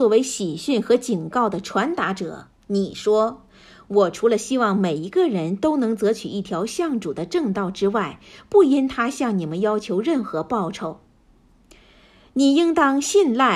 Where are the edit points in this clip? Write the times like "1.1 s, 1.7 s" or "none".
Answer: 2.6 s